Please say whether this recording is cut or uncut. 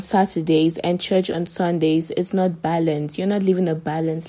uncut